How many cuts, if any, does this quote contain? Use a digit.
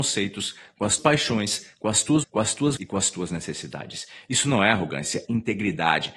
4